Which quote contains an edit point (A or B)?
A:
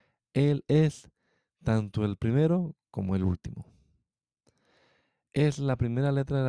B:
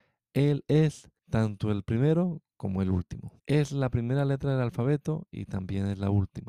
B